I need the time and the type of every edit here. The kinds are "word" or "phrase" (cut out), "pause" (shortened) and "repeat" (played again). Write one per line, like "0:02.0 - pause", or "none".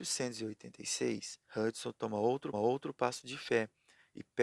0:01.5 - pause
0:02.5 - repeat